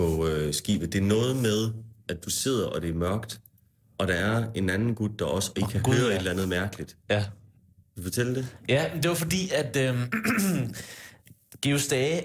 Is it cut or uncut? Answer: uncut